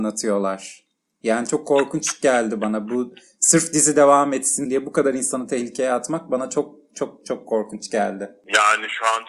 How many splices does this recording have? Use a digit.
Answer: 1